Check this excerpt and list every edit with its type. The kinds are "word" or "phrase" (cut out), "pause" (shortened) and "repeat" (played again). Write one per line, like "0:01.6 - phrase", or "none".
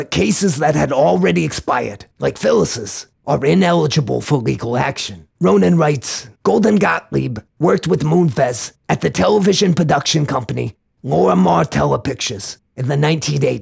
0:02.1 - pause
0:03.1 - pause
0:05.3 - pause
0:06.4 - pause